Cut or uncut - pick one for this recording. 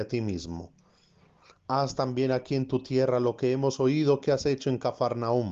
uncut